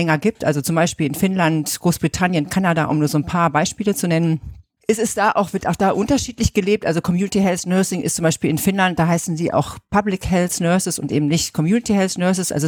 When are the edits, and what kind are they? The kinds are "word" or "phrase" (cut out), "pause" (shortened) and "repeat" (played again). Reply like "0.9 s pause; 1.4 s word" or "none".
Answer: none